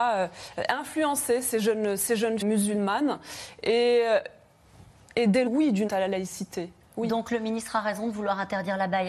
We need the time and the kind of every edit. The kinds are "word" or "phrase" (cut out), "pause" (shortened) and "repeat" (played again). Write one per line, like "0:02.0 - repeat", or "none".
0:02.4 - word
0:05.5 - phrase
0:05.9 - word